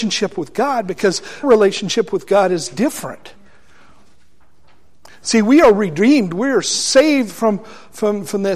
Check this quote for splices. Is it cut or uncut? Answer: cut